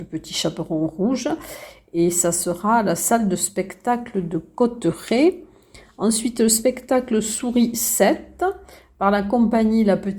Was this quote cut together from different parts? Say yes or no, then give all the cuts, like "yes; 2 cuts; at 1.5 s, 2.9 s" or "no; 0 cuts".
no; 0 cuts